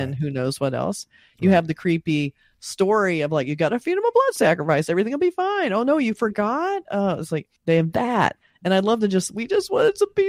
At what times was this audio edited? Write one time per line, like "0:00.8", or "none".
0:07.6